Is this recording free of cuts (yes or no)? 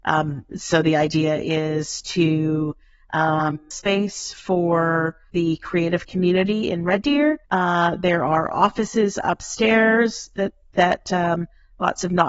no